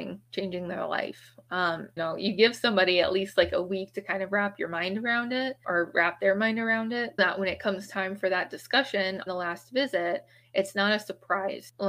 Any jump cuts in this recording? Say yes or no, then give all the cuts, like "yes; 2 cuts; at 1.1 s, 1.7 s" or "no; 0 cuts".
yes; 4 cuts; at 2.0 s, 5.6 s, 7.2 s, 9.3 s